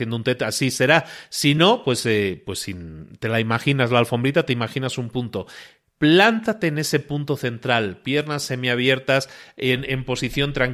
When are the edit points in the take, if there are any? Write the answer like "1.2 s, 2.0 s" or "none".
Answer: none